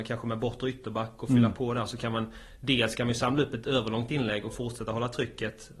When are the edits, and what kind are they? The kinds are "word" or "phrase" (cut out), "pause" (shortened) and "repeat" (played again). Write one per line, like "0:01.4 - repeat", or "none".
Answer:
none